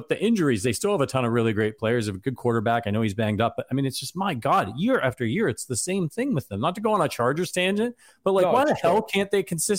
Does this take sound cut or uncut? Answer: uncut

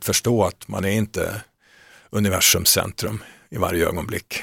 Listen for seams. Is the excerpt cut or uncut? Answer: uncut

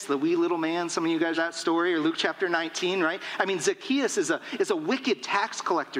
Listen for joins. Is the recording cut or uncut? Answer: cut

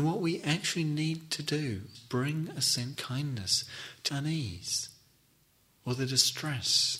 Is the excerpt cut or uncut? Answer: cut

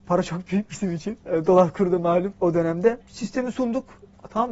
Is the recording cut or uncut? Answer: uncut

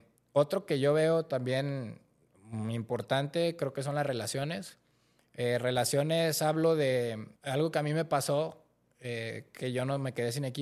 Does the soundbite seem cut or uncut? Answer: cut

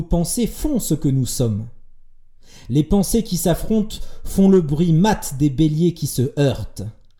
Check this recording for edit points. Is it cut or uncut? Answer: uncut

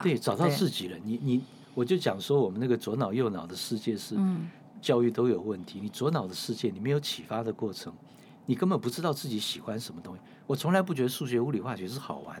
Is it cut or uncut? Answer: uncut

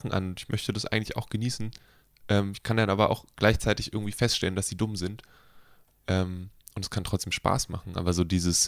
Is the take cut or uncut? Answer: uncut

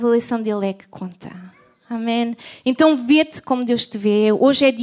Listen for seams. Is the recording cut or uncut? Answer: uncut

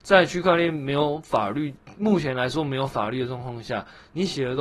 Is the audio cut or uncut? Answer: uncut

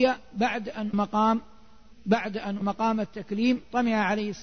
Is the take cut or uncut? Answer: cut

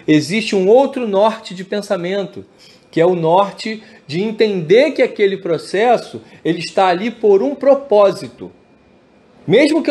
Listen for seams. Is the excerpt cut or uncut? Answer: uncut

